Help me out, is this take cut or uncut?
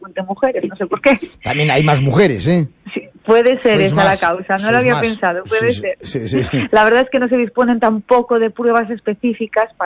uncut